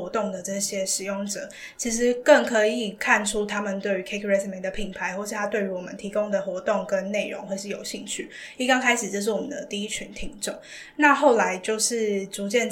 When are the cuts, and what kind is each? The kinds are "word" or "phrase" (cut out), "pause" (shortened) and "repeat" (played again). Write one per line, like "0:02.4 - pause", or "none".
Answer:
none